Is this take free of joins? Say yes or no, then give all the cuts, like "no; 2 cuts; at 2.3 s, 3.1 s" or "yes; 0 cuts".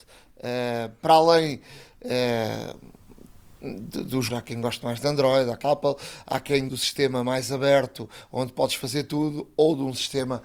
no; 3 cuts; at 4.3 s, 5.6 s, 6.7 s